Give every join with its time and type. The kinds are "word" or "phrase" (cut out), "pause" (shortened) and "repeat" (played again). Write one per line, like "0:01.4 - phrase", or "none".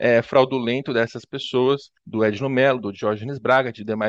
0:02.0 - pause